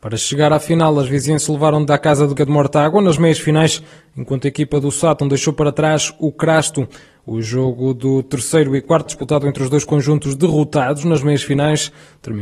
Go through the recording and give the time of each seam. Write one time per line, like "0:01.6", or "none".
0:01.9
0:02.4
0:09.1